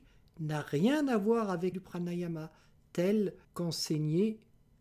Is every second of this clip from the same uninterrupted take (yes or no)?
no